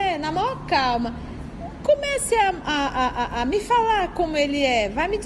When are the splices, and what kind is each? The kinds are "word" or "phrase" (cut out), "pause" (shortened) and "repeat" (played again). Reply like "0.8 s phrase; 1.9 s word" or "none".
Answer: none